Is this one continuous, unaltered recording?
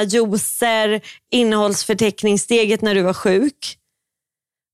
yes; 0 cuts

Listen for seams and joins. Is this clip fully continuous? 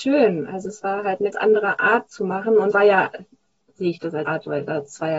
no; 5 cuts; at 1.3 s, 2.1 s, 2.7 s, 3.6 s, 4.3 s

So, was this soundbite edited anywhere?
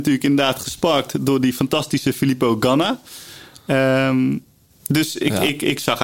no; 0 cuts

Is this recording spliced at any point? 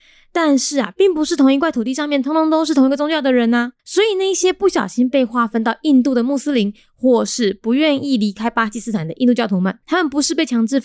yes; 2 cuts; at 3.8 s, 9.8 s

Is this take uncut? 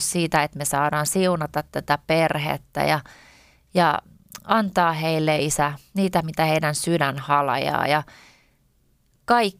yes; 0 cuts

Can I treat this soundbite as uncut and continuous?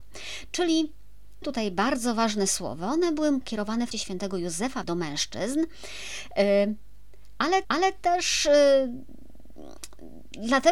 no; 5 cuts; at 1.4 s, 3.4 s, 3.9 s, 4.8 s, 7.6 s

